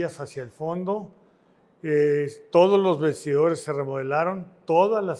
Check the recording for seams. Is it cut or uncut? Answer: uncut